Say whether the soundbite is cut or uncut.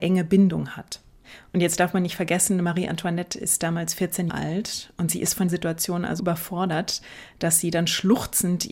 cut